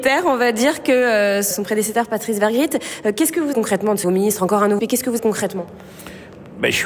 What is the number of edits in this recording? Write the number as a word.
five